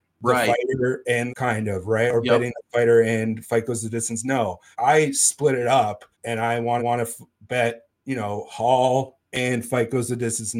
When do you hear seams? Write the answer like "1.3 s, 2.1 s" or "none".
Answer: 1.3 s, 4.7 s, 6.1 s, 6.8 s, 9.2 s